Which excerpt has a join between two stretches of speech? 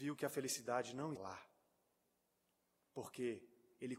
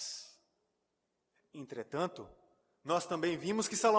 first; 1 cut; at 1.2 s

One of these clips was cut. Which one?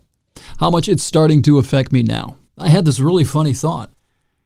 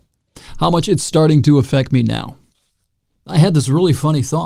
first; 1 cut; at 2.5 s

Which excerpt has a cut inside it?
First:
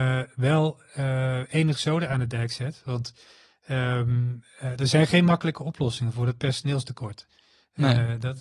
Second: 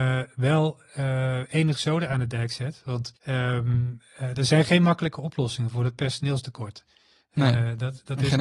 second; 1 cut; at 3.2 s

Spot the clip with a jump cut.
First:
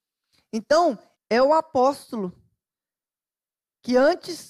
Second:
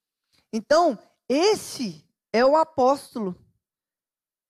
first; 1 cut; at 1.1 s

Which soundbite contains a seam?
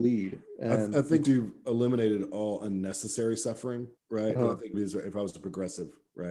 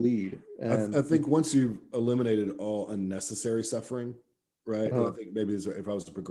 first; 3 cuts; at 1.2 s, 4.0 s, 4.7 s

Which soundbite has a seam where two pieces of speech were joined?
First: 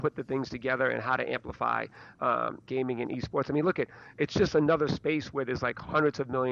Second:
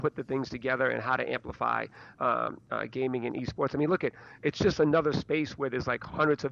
first; 1 cut; at 2.7 s

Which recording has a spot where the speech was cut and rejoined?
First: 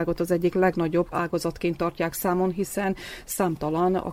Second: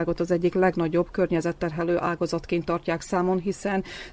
first; 1 cut; at 1.1 s

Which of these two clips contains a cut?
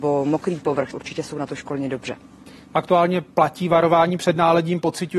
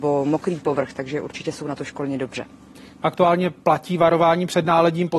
first; 1 cut; at 0.9 s

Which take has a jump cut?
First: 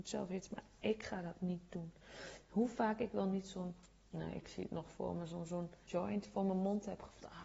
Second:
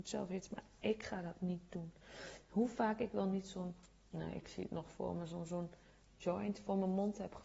first; 1 cut; at 5.8 s

